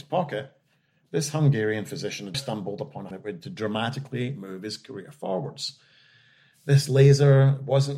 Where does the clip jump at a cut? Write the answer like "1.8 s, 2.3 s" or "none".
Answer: 2.3 s, 3.1 s